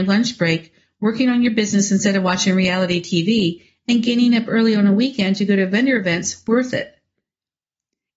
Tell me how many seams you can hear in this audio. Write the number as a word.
zero